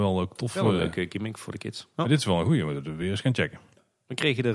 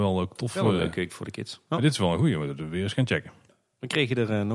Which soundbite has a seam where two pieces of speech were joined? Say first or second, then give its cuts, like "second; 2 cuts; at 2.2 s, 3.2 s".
second; 1 cut; at 1.1 s